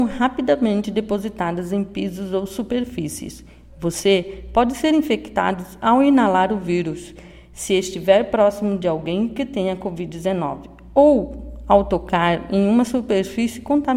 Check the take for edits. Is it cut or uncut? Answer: uncut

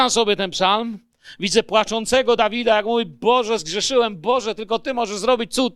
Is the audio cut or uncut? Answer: uncut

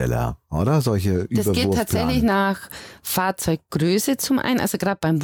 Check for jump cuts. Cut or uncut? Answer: uncut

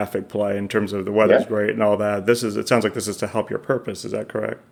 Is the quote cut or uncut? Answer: uncut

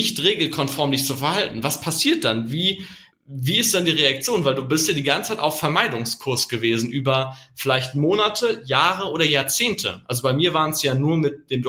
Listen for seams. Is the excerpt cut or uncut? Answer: cut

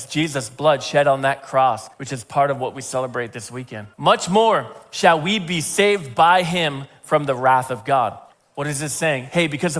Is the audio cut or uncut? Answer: cut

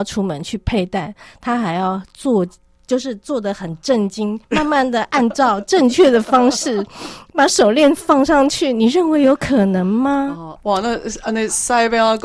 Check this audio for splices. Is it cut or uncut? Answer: cut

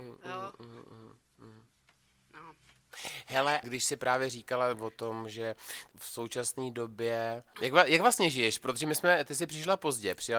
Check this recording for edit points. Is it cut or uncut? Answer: cut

